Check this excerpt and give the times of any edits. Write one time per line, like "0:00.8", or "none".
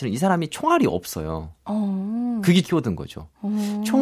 0:02.6